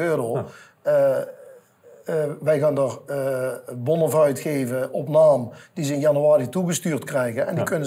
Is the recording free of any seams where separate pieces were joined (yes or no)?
yes